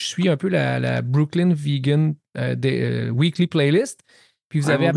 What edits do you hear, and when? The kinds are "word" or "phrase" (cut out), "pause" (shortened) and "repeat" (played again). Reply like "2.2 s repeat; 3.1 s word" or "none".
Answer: none

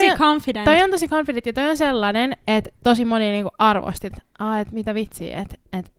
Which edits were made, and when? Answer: 4.1 s phrase

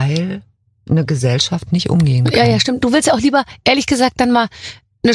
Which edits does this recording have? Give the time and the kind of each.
1.7 s word

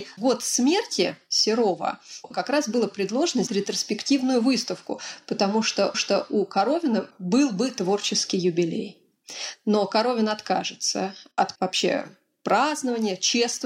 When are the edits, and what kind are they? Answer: 2.3 s word; 3.5 s word; 5.9 s repeat; 11.5 s word

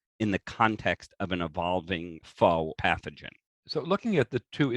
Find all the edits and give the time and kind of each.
2.8 s word; 3.5 s pause

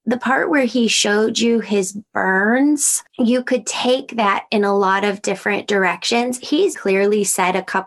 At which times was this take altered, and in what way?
3.1 s pause; 6.7 s word

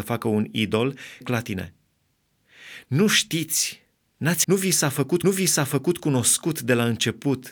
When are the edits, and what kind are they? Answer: 1.2 s phrase; 4.4 s word; 5.2 s repeat

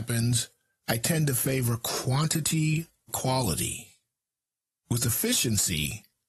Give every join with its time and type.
3.1 s word

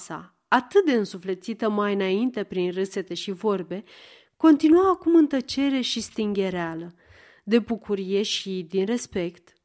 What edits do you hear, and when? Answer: none

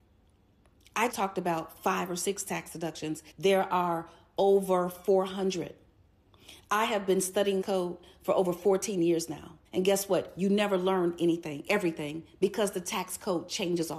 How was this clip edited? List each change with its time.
1.1 s word; 3.3 s pause; 7.6 s phrase; 9.6 s pause

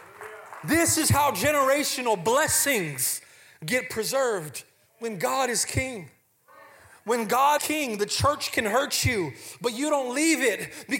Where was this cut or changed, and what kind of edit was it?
7.6 s word

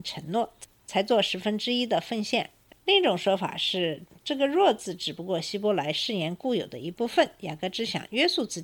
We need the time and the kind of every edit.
none

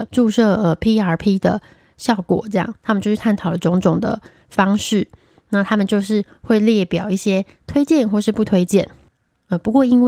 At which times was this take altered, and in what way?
none

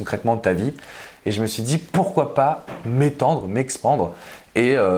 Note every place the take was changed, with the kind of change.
none

